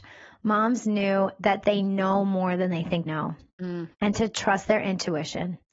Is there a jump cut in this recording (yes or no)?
yes